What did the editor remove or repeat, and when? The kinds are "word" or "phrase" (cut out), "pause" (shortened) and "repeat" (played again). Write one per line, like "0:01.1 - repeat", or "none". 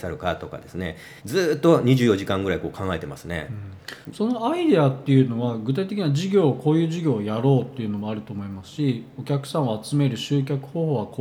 0:01.2 - pause

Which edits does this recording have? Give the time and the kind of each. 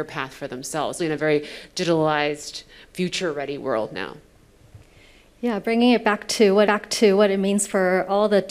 0:01.0 - word
0:06.7 - repeat

